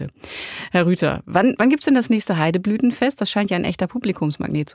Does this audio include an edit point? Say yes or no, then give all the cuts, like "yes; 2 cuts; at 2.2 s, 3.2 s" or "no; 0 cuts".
no; 0 cuts